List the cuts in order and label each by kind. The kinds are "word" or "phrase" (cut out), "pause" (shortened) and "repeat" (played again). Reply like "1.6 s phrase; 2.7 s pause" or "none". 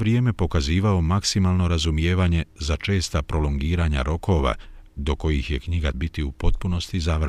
5.9 s word